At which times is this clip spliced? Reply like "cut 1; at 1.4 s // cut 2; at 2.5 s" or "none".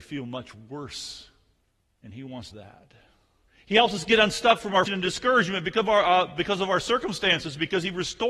cut 1; at 1.6 s // cut 2; at 2.5 s // cut 3; at 3.5 s // cut 4; at 4.9 s